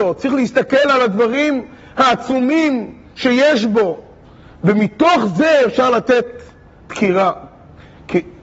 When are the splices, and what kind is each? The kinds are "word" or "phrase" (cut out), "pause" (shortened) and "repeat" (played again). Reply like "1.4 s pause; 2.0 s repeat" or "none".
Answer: none